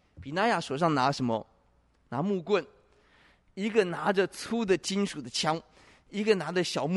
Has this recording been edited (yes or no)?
no